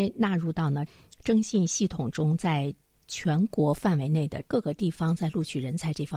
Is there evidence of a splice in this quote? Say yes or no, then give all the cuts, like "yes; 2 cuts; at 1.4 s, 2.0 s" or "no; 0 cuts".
no; 0 cuts